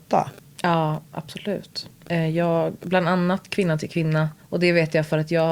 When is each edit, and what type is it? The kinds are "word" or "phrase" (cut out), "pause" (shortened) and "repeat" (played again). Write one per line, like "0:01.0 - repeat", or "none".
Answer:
0:04.4 - pause